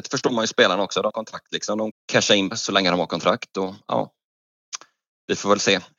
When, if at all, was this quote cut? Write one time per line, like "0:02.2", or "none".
0:01.1
0:01.9
0:02.5